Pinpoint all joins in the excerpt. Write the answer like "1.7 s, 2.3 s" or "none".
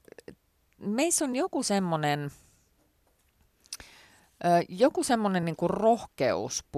none